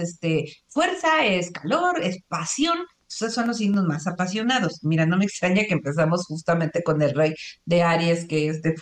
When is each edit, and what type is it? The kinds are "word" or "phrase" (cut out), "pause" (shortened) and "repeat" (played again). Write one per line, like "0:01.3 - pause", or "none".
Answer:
none